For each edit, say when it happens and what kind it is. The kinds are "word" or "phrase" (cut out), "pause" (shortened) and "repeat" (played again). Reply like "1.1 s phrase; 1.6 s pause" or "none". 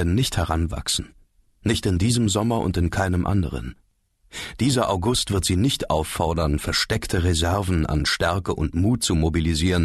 none